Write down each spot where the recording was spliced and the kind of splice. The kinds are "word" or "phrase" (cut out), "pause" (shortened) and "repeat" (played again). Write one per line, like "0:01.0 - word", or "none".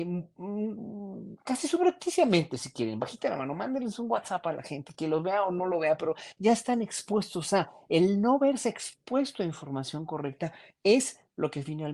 none